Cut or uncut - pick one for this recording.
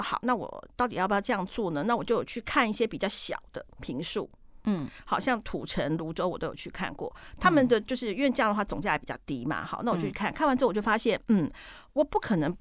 uncut